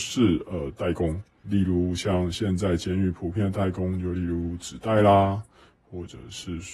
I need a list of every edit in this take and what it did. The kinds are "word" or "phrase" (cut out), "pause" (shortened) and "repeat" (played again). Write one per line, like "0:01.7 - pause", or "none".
0:01.4 - word